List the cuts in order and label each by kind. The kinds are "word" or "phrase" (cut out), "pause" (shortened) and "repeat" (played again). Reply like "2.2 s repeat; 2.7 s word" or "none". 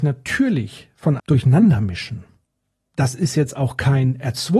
1.2 s word